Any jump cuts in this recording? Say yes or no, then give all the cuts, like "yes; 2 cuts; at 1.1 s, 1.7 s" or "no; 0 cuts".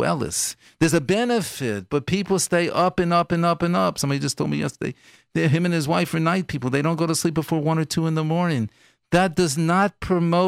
no; 0 cuts